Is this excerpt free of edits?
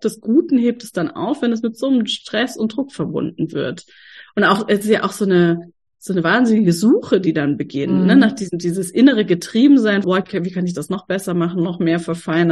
no; 1 cut; at 10.0 s

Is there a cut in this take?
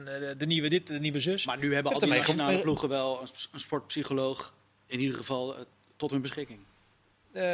no; 0 cuts

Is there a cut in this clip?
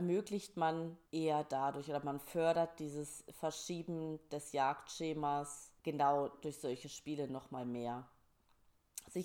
yes; 2 cuts; at 1.1 s, 5.8 s

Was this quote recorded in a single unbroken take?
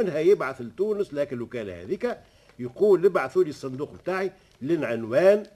yes; 0 cuts

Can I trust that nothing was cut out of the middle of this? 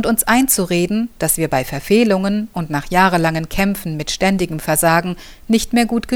yes; 0 cuts

